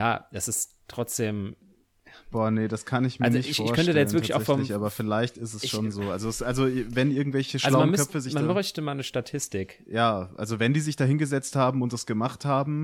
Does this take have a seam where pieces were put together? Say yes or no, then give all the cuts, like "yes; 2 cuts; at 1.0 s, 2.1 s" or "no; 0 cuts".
no; 0 cuts